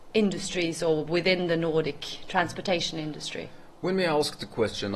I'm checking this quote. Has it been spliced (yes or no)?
no